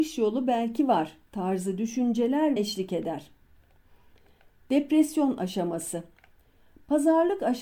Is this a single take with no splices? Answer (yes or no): no